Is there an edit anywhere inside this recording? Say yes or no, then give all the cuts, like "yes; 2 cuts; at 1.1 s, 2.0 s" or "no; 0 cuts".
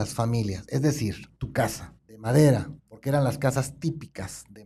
yes; 3 cuts; at 1.4 s, 2.0 s, 2.8 s